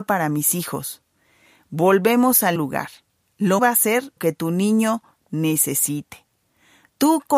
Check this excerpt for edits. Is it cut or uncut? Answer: cut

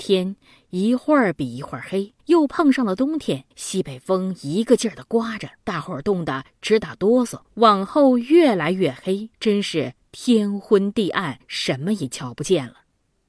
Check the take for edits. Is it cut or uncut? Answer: cut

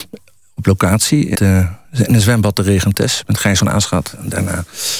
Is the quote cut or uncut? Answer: cut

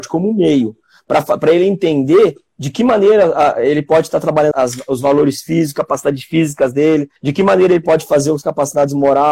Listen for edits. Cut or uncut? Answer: cut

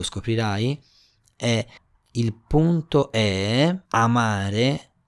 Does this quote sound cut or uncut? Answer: cut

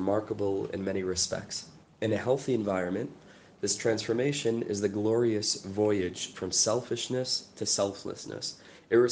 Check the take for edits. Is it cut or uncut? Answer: uncut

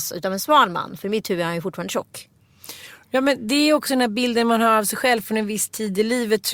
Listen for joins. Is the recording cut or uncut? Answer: uncut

